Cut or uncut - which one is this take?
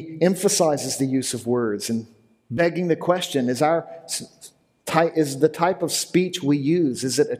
uncut